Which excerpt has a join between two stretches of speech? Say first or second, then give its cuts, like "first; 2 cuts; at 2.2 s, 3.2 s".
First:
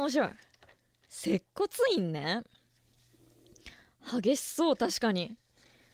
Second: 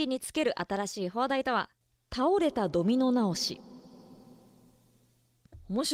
second; 1 cut; at 1.8 s